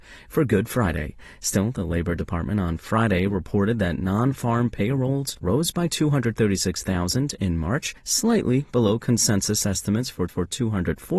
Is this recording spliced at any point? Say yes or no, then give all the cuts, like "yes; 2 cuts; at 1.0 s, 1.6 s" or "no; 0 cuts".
yes; 2 cuts; at 8.0 s, 10.3 s